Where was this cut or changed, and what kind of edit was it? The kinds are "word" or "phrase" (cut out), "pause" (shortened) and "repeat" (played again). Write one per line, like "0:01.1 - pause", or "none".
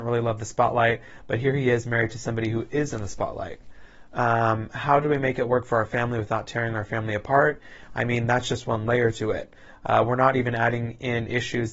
none